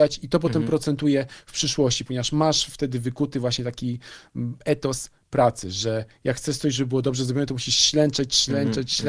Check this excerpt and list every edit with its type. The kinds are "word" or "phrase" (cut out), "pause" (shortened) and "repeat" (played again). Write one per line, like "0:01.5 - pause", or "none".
none